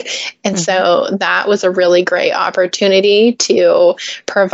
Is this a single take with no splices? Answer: yes; 0 cuts

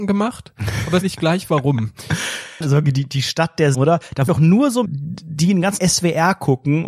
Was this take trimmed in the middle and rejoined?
yes; 6 cuts; at 1.0 s, 2.6 s, 3.7 s, 4.3 s, 4.9 s, 5.8 s

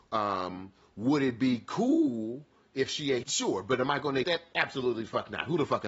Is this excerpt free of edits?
no; 2 cuts; at 3.2 s, 4.2 s

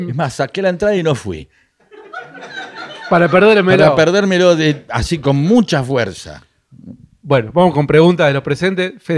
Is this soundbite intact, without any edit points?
yes; 0 cuts

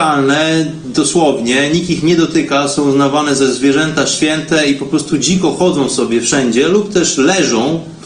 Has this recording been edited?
no; 0 cuts

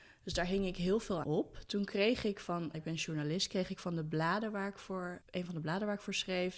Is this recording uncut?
no; 3 cuts; at 1.2 s, 2.7 s, 5.2 s

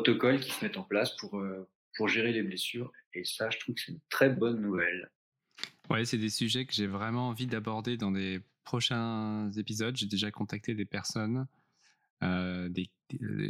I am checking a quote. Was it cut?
no; 0 cuts

